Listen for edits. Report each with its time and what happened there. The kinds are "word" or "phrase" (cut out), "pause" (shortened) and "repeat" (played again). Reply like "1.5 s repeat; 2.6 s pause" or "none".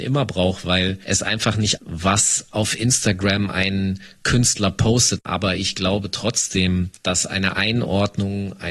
1.8 s word